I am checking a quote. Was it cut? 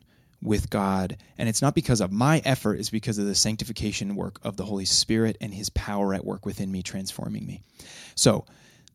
no; 0 cuts

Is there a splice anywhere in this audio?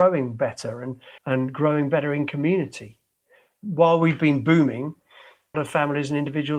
yes; 2 cuts; at 1.2 s, 5.5 s

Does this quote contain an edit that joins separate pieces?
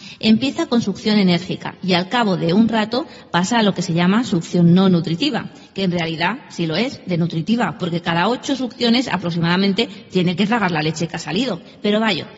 no; 0 cuts

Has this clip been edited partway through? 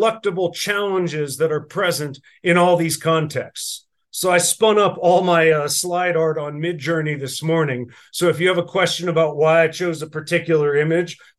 no; 0 cuts

